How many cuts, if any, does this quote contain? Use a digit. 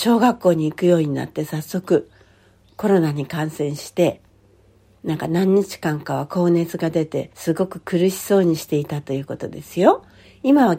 1